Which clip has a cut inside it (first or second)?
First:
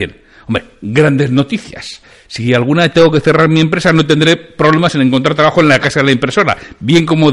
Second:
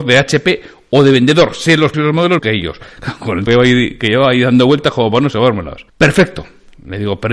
second